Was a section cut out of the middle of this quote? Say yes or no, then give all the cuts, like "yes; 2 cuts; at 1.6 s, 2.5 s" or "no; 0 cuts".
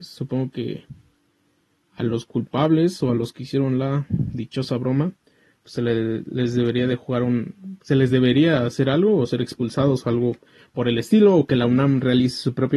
no; 0 cuts